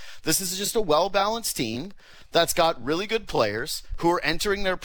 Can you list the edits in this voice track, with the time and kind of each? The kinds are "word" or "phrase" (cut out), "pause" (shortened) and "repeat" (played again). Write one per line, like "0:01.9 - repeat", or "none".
none